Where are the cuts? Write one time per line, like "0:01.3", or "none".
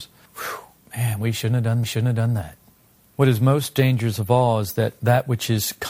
0:01.8